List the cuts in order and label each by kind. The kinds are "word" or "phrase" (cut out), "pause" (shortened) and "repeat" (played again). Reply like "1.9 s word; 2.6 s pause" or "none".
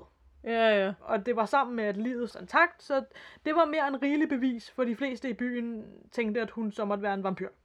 2.3 s phrase; 6.1 s pause